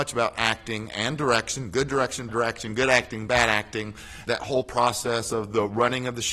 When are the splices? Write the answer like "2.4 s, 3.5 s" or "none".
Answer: 2.3 s, 4.3 s